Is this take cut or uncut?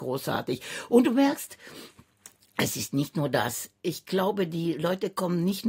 uncut